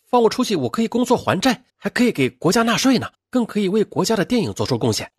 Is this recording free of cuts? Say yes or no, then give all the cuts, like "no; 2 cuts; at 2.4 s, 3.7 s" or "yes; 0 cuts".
no; 2 cuts; at 1.7 s, 3.1 s